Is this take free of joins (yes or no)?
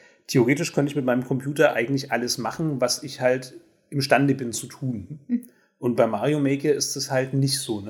yes